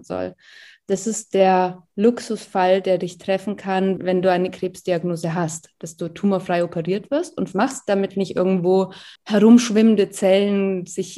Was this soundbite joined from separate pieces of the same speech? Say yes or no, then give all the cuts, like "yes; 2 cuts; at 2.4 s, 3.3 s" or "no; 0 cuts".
yes; 4 cuts; at 1.9 s, 4.0 s, 7.5 s, 9.2 s